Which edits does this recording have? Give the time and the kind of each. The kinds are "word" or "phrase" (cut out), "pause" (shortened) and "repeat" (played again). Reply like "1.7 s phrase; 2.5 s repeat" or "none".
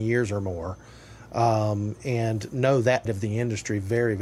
3.1 s word